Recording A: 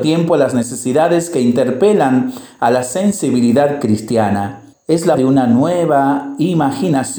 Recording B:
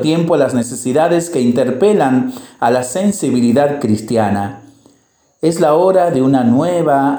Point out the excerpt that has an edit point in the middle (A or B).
A